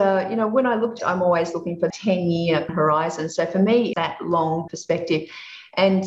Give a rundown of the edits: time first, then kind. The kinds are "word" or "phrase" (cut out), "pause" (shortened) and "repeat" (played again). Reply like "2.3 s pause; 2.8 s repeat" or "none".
1.0 s word; 1.9 s word; 2.7 s word; 3.9 s word; 4.7 s word